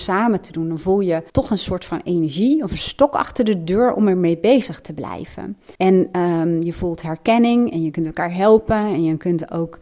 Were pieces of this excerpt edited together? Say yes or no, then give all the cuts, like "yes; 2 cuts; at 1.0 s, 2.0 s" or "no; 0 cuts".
yes; 2 cuts; at 1.3 s, 5.7 s